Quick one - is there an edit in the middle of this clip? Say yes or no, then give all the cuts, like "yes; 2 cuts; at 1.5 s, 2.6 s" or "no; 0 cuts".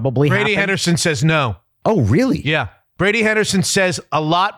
no; 0 cuts